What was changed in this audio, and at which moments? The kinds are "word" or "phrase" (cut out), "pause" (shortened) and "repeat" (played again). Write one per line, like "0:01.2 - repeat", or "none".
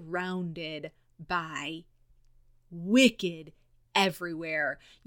0:02.5 - word
0:03.8 - word